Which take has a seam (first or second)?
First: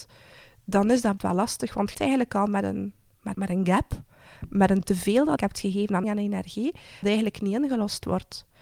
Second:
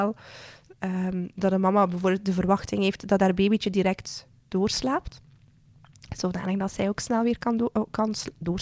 first